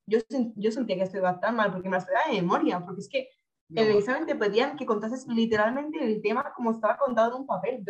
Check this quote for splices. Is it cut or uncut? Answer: uncut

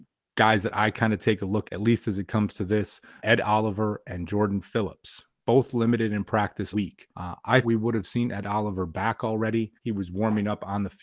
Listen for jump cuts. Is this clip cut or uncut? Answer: cut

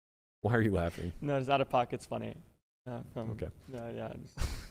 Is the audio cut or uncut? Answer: uncut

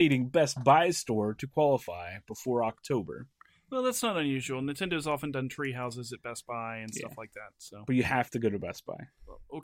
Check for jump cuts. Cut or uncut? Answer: uncut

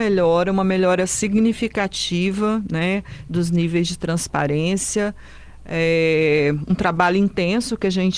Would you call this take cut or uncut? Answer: uncut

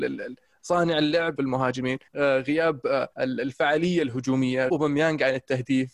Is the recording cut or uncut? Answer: cut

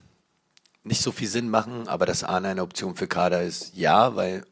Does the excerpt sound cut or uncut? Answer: uncut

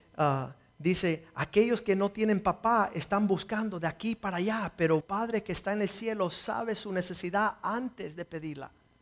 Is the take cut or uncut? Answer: cut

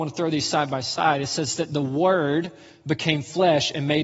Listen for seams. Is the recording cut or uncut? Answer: uncut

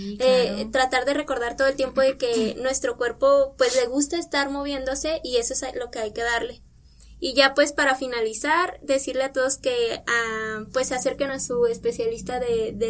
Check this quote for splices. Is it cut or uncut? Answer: uncut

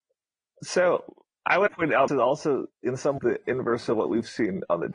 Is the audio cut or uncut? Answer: cut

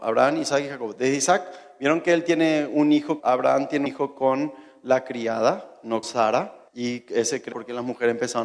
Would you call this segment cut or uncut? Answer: cut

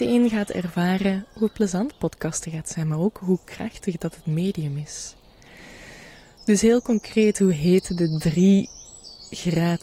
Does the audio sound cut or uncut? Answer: uncut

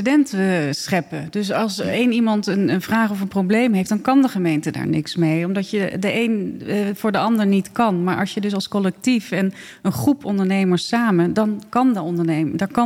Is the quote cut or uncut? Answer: uncut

